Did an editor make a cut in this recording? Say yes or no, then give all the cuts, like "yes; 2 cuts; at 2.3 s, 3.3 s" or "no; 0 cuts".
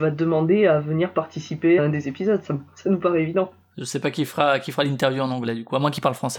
yes; 1 cut; at 1.8 s